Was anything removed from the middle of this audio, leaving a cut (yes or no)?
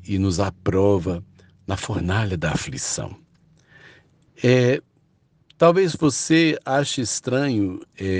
no